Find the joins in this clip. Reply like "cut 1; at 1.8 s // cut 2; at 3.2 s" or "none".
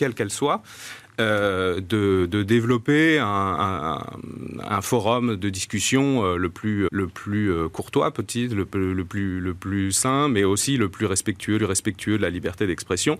cut 1; at 4.7 s // cut 2; at 6.9 s // cut 3; at 11.6 s